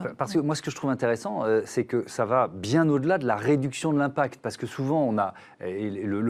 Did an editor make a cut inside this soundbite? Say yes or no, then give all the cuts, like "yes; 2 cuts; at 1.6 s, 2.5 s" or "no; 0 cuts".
no; 0 cuts